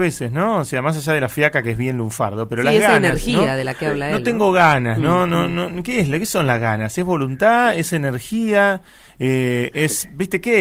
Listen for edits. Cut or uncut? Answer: uncut